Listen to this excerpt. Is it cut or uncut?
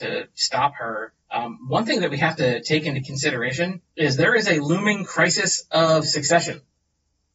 cut